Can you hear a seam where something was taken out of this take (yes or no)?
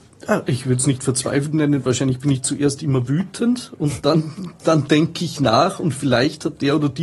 no